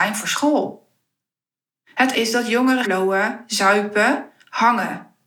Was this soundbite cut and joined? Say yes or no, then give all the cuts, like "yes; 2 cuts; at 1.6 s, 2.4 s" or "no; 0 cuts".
yes; 2 cuts; at 2.1 s, 2.8 s